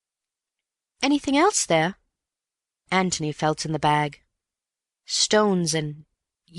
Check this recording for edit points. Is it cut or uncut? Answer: uncut